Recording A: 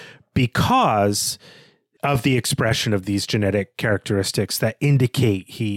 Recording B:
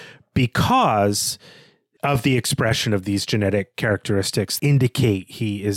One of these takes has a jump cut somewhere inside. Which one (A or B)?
B